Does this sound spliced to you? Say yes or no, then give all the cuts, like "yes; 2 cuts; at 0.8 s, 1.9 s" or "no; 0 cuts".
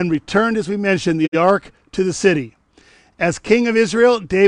no; 0 cuts